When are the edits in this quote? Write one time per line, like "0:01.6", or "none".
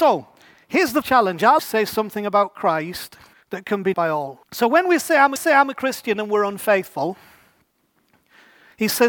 0:01.0
0:01.6
0:03.3
0:03.9
0:04.4
0:05.4